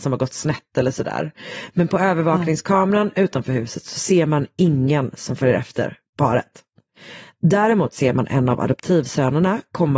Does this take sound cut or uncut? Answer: uncut